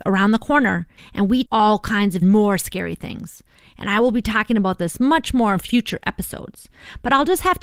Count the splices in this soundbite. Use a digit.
3